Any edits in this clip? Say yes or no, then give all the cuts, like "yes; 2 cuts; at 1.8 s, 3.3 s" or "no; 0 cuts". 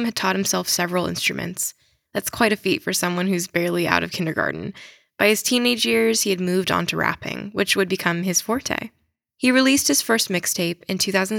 no; 0 cuts